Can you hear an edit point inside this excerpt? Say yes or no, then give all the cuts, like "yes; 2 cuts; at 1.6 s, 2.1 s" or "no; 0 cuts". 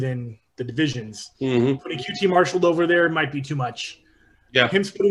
no; 0 cuts